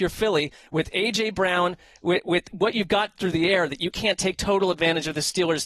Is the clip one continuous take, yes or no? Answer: yes